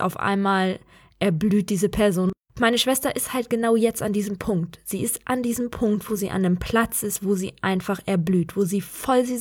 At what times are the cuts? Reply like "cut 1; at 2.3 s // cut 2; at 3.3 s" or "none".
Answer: none